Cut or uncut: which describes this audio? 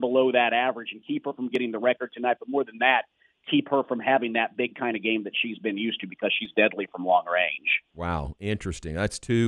uncut